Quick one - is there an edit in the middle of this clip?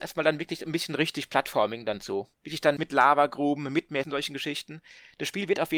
yes; 3 cuts; at 2.3 s, 2.8 s, 4.0 s

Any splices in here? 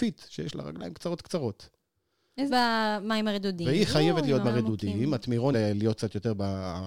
yes; 3 cuts; at 2.5 s, 4.4 s, 5.5 s

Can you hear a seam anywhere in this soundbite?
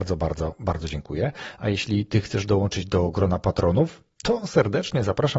no; 0 cuts

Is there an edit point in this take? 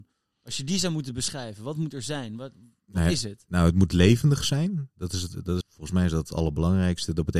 yes; 1 cut; at 5.6 s

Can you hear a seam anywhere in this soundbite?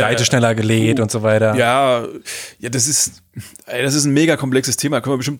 no; 0 cuts

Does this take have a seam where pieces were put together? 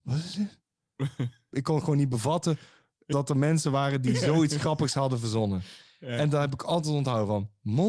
no; 0 cuts

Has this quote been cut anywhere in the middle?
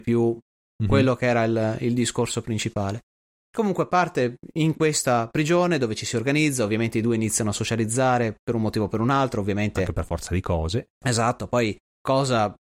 no; 0 cuts

